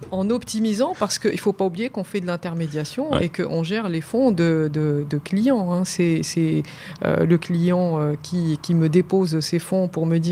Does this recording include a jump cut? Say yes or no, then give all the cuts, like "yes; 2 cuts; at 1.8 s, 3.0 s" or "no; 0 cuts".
no; 0 cuts